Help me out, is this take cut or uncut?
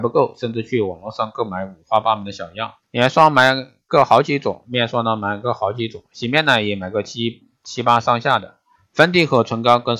cut